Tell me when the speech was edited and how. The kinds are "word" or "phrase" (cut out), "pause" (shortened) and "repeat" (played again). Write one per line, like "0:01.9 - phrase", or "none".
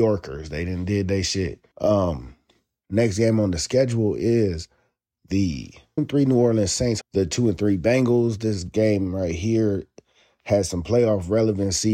0:01.7 - pause
0:06.0 - word
0:07.0 - word